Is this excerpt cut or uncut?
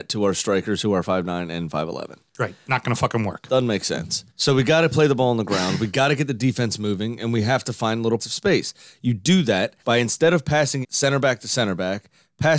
cut